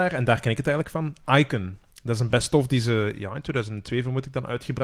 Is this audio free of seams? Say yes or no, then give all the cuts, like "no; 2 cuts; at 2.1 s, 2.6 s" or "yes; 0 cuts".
yes; 0 cuts